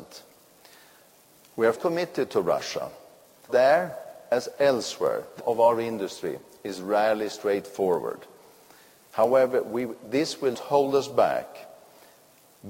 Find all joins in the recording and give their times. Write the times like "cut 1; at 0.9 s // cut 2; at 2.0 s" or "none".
cut 1; at 1.7 s // cut 2; at 3.5 s // cut 3; at 5.4 s // cut 4; at 10.5 s